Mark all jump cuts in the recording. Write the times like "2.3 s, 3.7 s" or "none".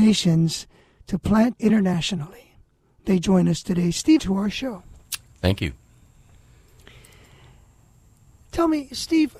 1.5 s, 4.2 s